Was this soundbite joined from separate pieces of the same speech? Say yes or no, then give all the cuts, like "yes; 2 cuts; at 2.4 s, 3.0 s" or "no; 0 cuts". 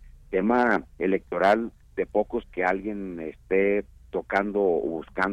yes; 2 cuts; at 0.9 s, 2.4 s